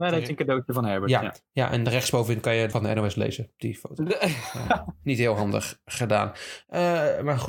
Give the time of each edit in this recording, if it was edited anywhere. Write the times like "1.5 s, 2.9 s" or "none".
2.7 s